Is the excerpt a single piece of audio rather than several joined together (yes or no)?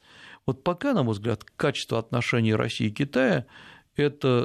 yes